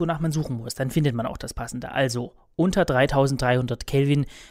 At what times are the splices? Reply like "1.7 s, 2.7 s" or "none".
none